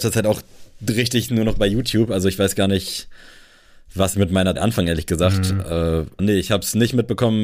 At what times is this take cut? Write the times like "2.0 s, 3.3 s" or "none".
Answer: 1.3 s, 4.1 s, 4.6 s, 6.2 s